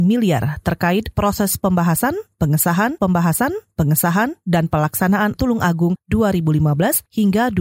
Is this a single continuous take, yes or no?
no